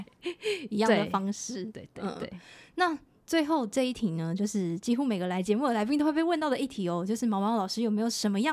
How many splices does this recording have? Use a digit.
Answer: 0